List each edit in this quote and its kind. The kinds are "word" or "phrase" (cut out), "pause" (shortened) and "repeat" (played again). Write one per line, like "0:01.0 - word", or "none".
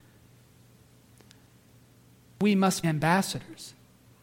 0:02.8 - word